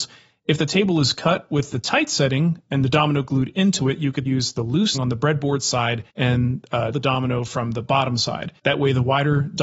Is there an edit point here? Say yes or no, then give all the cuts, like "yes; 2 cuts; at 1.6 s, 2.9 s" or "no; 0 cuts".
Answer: yes; 5 cuts; at 4.3 s, 4.9 s, 6.1 s, 6.9 s, 8.6 s